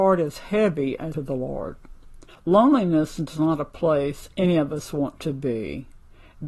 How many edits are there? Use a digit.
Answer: 2